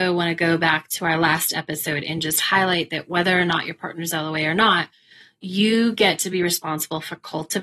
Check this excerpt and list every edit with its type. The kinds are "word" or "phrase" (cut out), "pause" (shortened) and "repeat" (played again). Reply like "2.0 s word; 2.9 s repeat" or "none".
none